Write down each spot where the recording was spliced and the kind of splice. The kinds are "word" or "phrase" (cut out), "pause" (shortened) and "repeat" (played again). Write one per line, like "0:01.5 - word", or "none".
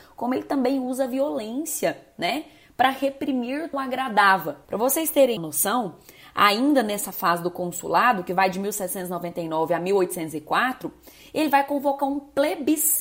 0:03.7 - phrase
0:04.6 - pause
0:05.4 - word